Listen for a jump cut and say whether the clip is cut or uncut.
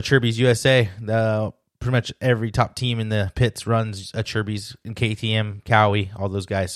uncut